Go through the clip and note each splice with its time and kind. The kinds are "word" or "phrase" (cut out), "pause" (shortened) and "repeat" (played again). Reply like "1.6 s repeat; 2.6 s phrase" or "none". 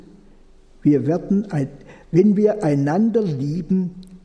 none